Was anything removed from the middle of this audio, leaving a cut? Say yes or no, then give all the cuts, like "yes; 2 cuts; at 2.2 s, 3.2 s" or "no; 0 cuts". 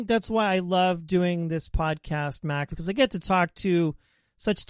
yes; 1 cut; at 2.7 s